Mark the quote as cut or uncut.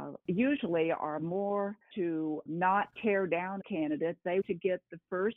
cut